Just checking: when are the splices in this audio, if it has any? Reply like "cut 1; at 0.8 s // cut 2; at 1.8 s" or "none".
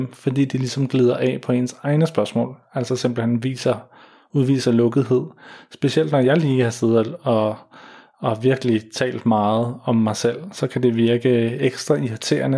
none